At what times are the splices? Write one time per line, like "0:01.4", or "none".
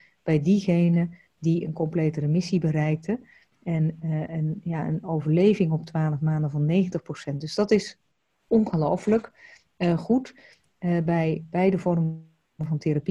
none